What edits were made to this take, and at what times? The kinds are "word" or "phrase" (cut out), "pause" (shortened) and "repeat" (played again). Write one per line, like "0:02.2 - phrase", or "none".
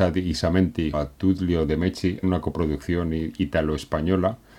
0:00.9 - word
0:02.2 - word